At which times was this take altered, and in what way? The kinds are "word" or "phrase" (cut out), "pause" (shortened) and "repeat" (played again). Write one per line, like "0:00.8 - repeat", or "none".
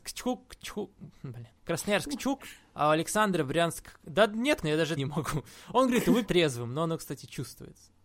0:01.6 - pause
0:04.6 - word
0:05.0 - phrase
0:06.3 - word